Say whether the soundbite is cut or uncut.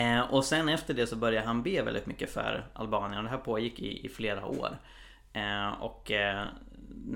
uncut